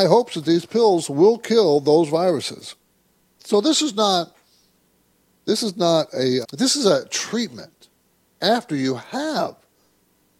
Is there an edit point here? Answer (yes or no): yes